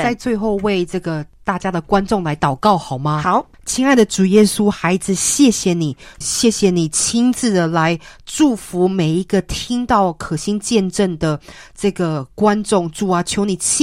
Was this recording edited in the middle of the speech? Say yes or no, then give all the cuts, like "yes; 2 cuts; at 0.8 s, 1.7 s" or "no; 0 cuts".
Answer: yes; 1 cut; at 6.2 s